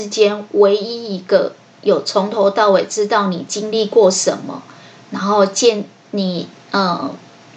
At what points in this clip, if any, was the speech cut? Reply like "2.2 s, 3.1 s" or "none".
none